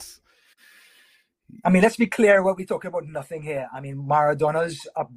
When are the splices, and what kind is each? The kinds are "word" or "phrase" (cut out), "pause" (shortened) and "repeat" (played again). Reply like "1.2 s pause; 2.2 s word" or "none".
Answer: none